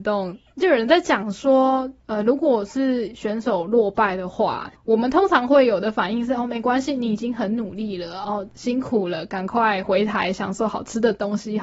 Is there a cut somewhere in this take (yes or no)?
no